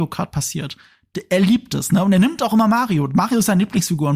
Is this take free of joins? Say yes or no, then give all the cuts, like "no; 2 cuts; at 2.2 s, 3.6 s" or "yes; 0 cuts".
yes; 0 cuts